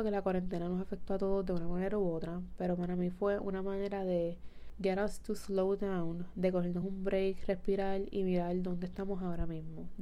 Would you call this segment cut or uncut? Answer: uncut